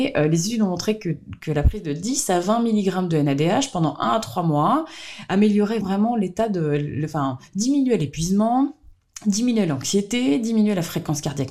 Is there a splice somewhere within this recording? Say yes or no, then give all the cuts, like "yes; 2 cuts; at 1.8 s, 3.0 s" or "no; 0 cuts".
yes; 1 cut; at 5.8 s